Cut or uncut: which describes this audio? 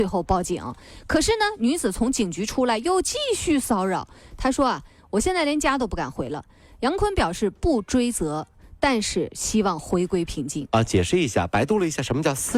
uncut